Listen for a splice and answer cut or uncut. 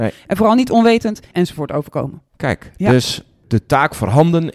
cut